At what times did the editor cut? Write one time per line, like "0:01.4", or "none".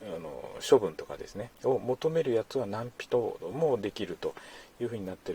0:01.5